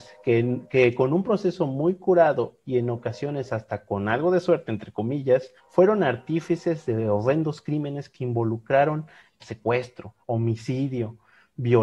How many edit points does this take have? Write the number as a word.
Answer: two